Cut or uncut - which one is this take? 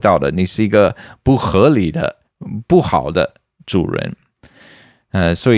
uncut